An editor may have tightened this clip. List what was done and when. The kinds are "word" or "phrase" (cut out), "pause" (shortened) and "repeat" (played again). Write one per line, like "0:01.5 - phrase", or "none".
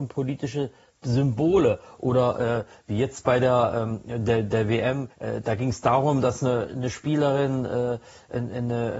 0:05.1 - pause